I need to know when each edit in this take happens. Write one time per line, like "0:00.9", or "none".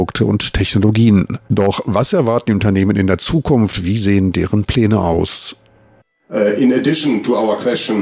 0:01.4